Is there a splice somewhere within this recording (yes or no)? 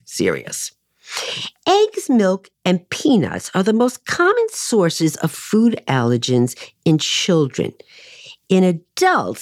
yes